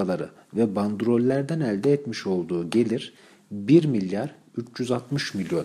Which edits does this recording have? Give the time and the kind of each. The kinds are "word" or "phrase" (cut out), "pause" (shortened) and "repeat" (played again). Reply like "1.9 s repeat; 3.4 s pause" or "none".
none